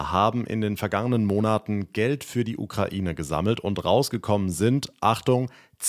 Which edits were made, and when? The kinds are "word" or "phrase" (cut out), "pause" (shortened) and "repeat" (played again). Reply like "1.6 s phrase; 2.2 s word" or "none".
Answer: none